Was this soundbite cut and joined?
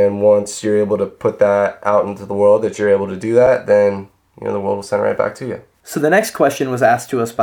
no; 0 cuts

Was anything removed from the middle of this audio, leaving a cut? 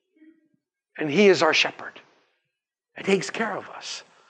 yes; 1 cut; at 3.0 s

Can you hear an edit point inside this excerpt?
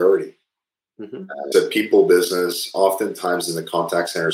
yes; 1 cut; at 1.5 s

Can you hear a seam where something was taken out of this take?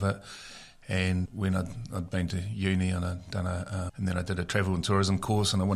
yes; 2 cuts; at 1.3 s, 3.9 s

